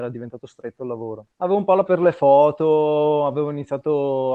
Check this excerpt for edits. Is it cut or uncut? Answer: cut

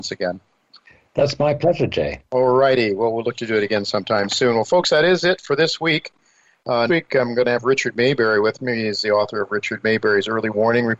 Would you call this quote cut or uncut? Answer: cut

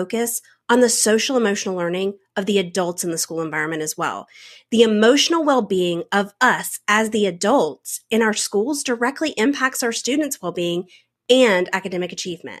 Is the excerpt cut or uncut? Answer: uncut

